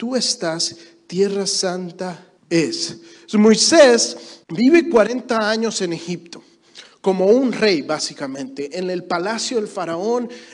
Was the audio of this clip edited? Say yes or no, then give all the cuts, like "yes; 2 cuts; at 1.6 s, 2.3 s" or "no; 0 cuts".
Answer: yes; 2 cuts; at 2.4 s, 4.4 s